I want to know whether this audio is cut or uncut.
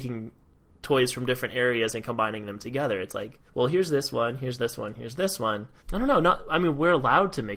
cut